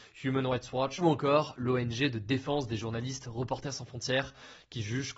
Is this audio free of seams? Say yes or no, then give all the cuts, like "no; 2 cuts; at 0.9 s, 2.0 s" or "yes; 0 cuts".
yes; 0 cuts